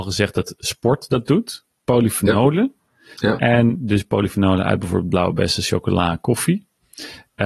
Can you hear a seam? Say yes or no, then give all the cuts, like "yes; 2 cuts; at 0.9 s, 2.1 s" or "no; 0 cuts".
no; 0 cuts